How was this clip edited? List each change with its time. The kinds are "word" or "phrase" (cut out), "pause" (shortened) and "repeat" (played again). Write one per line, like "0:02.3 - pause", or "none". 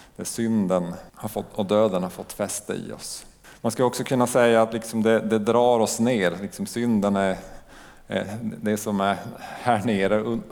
0:01.1 - pause
0:03.4 - pause